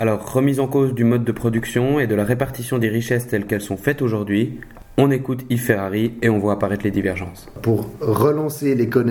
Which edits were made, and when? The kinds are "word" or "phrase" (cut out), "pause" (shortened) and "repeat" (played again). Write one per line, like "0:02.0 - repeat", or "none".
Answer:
none